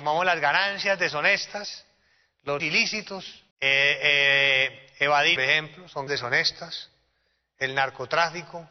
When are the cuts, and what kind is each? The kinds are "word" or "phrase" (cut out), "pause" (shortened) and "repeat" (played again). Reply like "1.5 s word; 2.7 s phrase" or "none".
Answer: 2.6 s word; 3.5 s pause; 5.4 s phrase; 6.1 s word